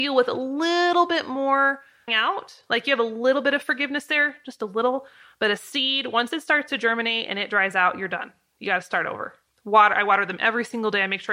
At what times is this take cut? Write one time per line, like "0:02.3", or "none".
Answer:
0:02.1
0:09.5